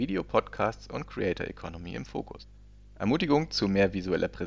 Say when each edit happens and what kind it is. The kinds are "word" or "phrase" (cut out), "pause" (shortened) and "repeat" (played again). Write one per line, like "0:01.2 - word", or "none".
none

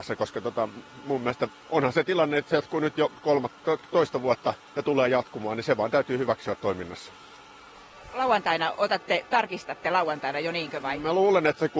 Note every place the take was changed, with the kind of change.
0:01.6 - pause
0:04.6 - pause

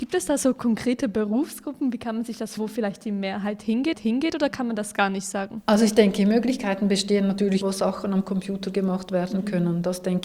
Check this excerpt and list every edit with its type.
0:02.6 - word
0:03.9 - repeat
0:07.6 - word

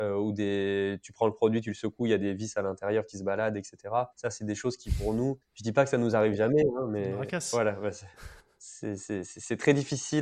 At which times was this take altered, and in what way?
0:04.1 - pause
0:05.4 - pause
0:08.4 - pause

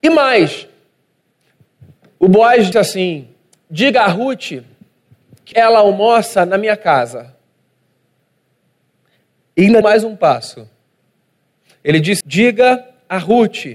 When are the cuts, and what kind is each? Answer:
0:02.7 - word
0:05.5 - word
0:09.8 - word
0:12.2 - word

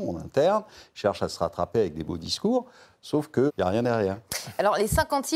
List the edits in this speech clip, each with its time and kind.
0:03.5 - word

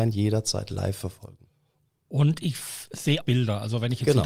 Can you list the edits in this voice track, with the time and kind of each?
0:03.2 - word

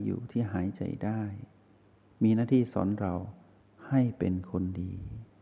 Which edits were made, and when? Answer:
none

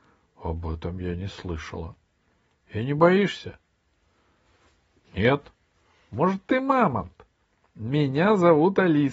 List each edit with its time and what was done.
none

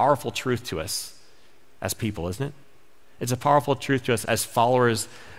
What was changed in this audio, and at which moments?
0:04.2 - word

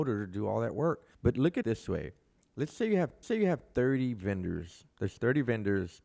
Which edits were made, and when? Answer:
0:01.1 - pause
0:01.6 - word
0:03.2 - repeat
0:04.9 - pause

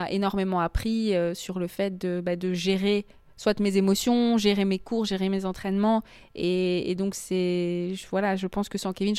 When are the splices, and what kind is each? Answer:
none

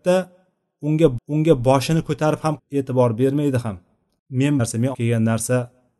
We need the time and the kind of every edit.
0:01.2 - repeat
0:02.6 - word
0:04.6 - phrase
0:04.9 - word

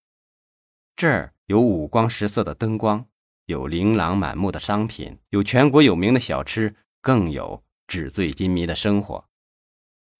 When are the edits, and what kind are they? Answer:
0:01.4 - pause
0:05.3 - pause

